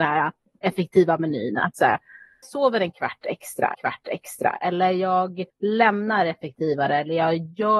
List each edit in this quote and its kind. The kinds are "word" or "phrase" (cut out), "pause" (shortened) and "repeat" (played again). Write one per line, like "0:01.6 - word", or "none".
0:02.4 - phrase
0:03.7 - repeat
0:05.5 - pause